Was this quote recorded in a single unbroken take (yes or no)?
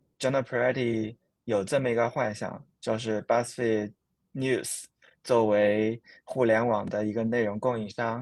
yes